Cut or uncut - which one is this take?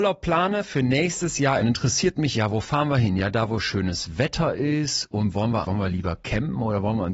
cut